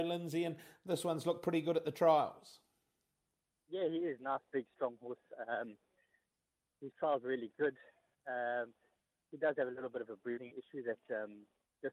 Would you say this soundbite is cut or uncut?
uncut